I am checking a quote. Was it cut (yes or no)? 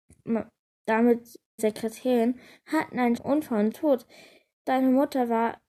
yes